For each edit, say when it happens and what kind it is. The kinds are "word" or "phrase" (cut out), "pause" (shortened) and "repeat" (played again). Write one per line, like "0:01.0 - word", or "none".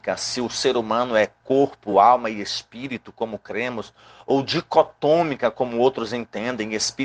none